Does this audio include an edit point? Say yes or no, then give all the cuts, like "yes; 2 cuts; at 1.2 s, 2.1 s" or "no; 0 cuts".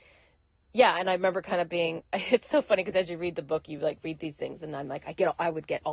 no; 0 cuts